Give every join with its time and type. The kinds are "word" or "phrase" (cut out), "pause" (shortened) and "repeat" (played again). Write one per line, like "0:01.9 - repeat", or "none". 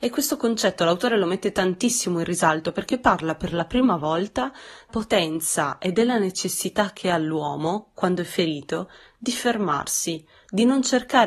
0:04.9 - word